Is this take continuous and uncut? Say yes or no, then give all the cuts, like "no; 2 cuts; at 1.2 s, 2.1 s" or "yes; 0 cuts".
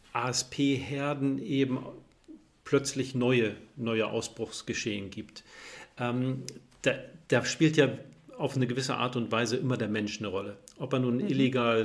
yes; 0 cuts